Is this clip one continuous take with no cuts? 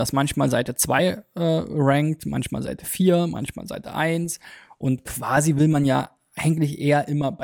yes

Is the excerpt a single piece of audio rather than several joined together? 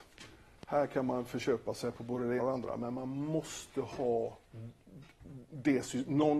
no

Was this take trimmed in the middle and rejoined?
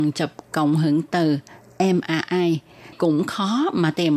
yes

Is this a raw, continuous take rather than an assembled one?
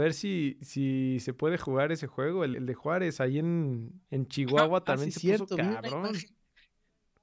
no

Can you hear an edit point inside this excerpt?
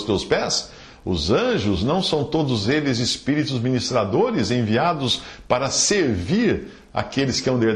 no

